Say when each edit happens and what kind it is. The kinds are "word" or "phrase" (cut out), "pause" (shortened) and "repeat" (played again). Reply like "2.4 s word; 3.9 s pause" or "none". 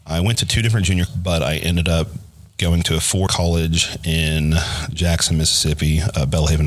1.1 s word; 3.3 s word